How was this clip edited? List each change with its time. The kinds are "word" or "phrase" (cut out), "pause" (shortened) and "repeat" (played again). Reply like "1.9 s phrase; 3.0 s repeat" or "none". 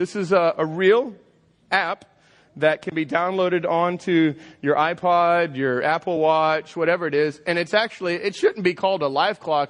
none